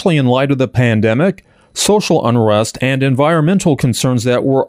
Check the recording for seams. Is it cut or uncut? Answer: uncut